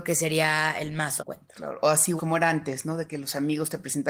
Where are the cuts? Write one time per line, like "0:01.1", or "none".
0:01.2
0:02.2